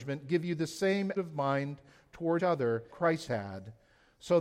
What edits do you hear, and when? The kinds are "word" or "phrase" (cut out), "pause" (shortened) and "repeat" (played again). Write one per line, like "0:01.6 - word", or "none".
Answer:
0:01.2 - word
0:02.4 - word
0:02.9 - word
0:03.3 - word